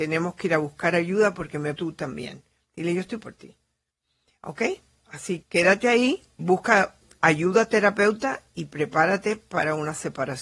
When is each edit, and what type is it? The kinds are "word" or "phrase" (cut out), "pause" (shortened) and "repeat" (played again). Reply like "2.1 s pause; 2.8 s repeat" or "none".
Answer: 1.8 s word; 3.2 s word; 5.4 s word; 6.4 s word